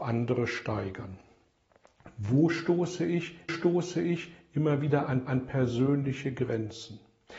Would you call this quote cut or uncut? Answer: cut